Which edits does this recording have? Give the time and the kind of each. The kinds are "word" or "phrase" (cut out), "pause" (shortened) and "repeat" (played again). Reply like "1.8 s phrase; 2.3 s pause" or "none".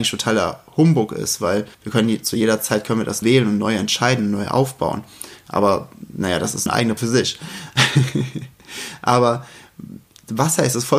1.7 s pause; 3.2 s word; 6.7 s word; 7.0 s word